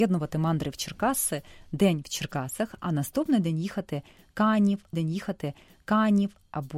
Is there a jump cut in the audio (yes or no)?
yes